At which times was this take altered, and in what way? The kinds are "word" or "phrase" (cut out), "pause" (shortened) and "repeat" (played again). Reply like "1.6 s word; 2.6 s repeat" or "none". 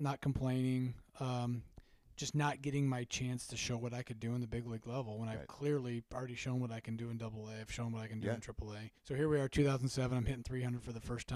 9.0 s pause